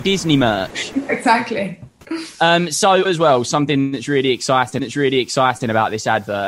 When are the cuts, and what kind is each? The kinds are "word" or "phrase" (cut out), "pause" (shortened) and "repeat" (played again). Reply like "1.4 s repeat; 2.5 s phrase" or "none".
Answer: 2.3 s pause; 3.0 s word; 4.8 s repeat